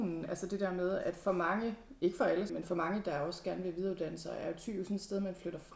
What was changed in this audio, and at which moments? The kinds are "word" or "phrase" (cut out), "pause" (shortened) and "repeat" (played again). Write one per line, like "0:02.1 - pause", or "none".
0:02.5 - word